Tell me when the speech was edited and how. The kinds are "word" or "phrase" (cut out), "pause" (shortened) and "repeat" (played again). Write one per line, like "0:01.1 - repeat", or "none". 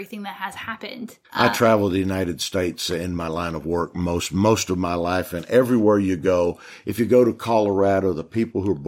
0:01.2 - pause